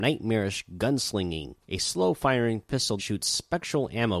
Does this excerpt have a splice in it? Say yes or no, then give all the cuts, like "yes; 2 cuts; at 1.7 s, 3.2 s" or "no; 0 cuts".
yes; 2 cuts; at 1.6 s, 3.0 s